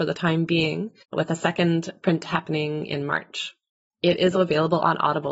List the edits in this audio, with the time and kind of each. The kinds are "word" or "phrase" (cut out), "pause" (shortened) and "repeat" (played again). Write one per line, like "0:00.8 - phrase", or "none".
0:01.0 - pause
0:04.3 - word